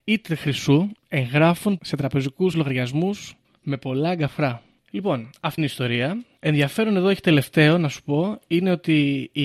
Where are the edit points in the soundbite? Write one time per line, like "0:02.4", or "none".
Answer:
0:01.0
0:01.8
0:02.5
0:03.4
0:05.6